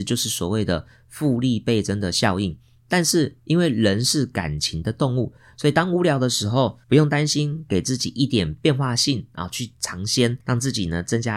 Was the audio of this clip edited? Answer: yes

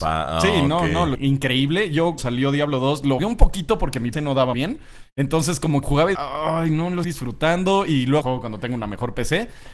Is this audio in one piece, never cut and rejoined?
no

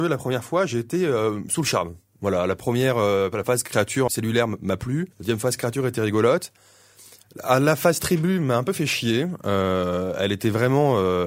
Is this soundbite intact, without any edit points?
no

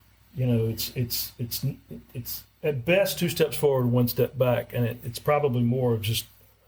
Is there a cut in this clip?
no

